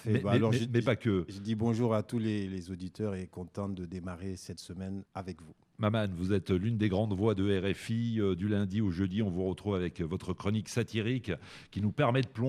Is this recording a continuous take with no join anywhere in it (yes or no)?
no